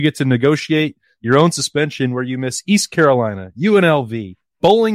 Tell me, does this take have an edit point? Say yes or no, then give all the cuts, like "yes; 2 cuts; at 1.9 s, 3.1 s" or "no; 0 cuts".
no; 0 cuts